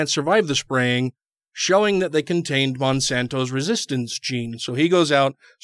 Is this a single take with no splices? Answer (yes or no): yes